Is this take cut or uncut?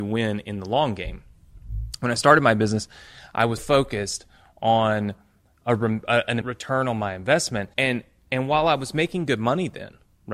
cut